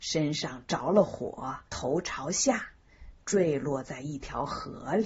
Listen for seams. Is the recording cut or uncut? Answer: cut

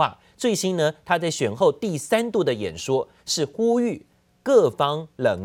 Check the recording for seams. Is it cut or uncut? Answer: uncut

